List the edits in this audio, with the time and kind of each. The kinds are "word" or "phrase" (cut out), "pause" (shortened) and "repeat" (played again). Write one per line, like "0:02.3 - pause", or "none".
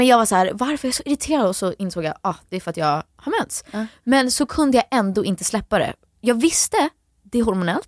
none